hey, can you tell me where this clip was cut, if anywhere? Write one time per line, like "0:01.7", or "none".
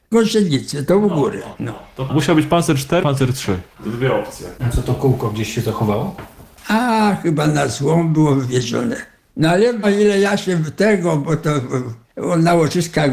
0:03.0
0:09.3
0:09.8
0:12.0